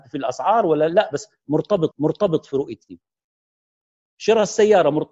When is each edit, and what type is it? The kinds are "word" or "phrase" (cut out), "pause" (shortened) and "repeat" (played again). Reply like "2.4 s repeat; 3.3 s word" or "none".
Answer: 1.9 s repeat